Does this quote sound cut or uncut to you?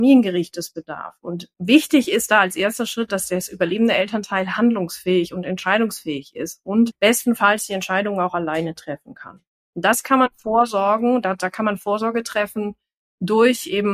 uncut